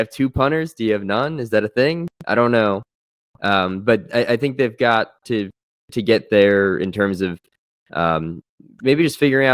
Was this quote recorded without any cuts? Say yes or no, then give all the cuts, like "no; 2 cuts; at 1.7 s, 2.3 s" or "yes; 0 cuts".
yes; 0 cuts